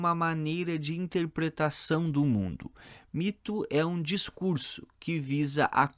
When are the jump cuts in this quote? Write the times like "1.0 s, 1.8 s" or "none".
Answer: none